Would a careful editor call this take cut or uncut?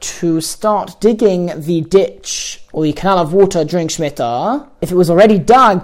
uncut